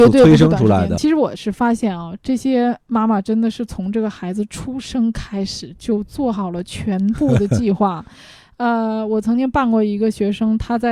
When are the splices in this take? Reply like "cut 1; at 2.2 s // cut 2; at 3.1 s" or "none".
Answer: none